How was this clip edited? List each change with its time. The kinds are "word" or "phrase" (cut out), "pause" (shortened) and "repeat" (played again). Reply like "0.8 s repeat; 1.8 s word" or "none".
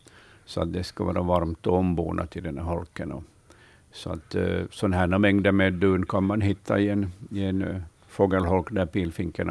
none